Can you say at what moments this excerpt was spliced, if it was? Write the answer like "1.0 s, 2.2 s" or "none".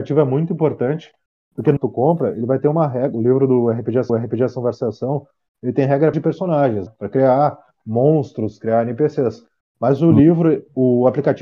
1.8 s, 4.1 s, 6.1 s, 6.9 s

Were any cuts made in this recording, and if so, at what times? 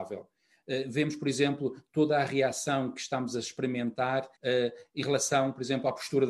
4.4 s

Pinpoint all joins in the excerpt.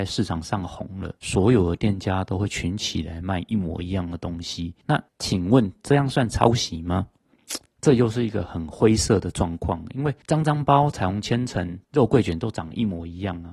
1.2 s, 5.1 s, 10.2 s, 11.8 s

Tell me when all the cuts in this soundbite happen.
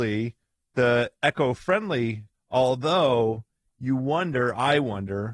2.3 s

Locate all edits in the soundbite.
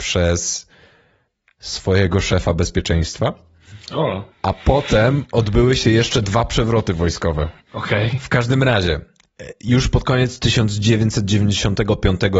4.3 s, 7.6 s

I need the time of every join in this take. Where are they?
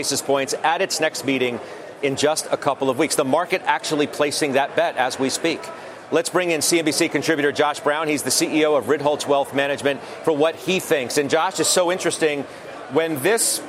none

